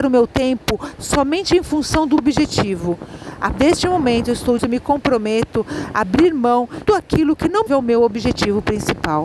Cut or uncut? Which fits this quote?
cut